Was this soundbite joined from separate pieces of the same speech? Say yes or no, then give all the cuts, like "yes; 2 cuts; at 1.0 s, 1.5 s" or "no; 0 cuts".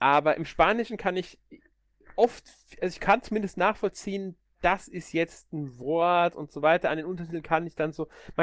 no; 0 cuts